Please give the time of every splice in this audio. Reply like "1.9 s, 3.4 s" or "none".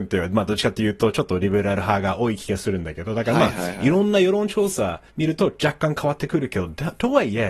5.1 s